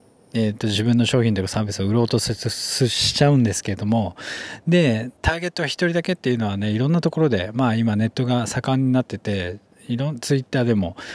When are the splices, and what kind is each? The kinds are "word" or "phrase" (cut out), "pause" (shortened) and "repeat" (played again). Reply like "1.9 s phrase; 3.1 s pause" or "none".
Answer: 5.2 s pause

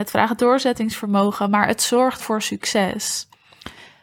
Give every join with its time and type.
2.2 s word

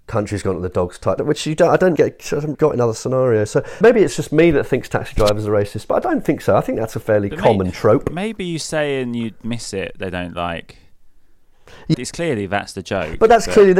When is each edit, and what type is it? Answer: 1.2 s word; 2.0 s word; 2.5 s word; 3.8 s word; 11.9 s word

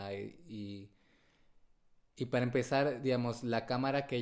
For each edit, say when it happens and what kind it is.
none

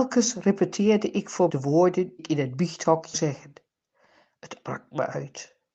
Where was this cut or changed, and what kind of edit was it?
1.5 s word; 2.2 s word; 3.1 s word; 4.6 s word

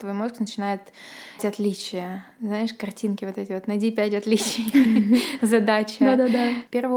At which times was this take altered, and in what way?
1.4 s word

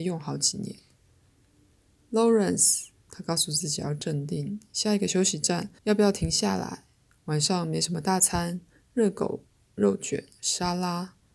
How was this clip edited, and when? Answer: 5.8 s pause

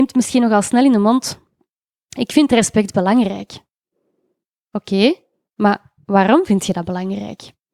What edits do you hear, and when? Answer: none

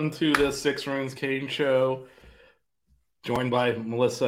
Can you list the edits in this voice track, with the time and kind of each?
none

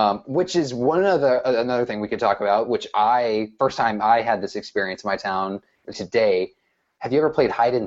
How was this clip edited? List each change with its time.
5.9 s word

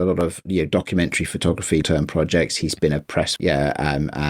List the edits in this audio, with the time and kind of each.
1.8 s word; 3.4 s word

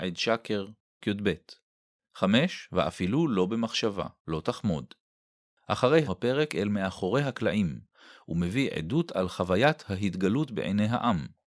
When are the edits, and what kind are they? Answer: 1.0 s word; 4.2 s pause; 6.1 s phrase

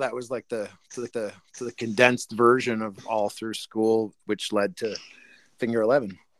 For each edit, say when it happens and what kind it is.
1.1 s repeat

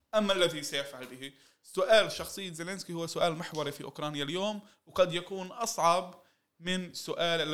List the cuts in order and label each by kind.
none

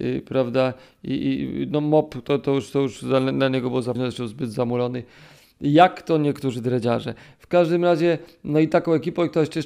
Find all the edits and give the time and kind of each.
3.9 s word

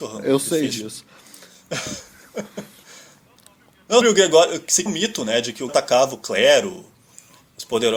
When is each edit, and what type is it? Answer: 4.0 s word; 4.9 s word; 5.7 s word

